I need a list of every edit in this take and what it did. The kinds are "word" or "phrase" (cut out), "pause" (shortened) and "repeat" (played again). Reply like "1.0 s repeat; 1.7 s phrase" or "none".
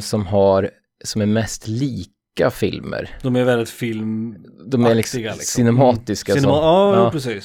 none

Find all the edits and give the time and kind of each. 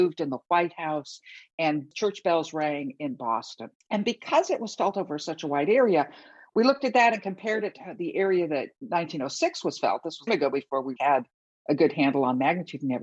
3.7 s pause; 10.3 s phrase; 11.0 s word

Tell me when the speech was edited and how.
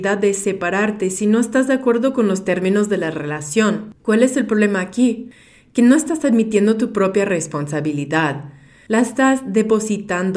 4.0 s pause

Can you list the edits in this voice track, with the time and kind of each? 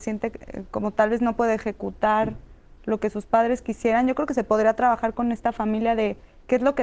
none

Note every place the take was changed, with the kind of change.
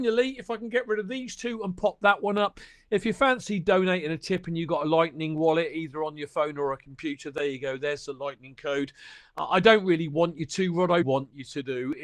11.0 s word

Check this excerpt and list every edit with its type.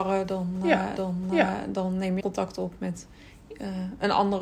1.0 s repeat; 2.2 s word

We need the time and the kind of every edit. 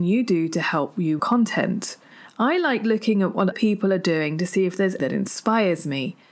1.2 s phrase; 2.1 s pause; 3.5 s word; 5.0 s word

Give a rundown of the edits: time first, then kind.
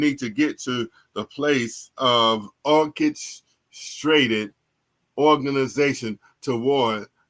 2.6 s pause

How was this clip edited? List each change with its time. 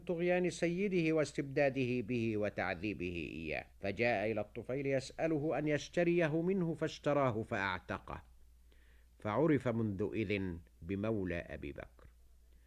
3.7 s pause

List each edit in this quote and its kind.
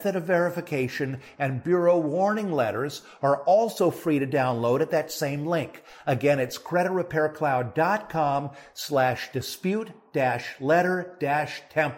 none

